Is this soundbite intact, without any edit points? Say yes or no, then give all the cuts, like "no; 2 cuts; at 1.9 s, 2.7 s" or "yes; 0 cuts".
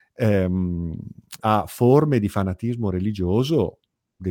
no; 1 cut; at 1.4 s